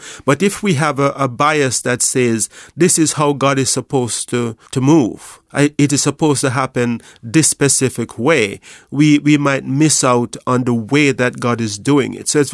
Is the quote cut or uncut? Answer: cut